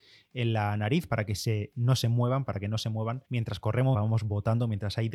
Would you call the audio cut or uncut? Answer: cut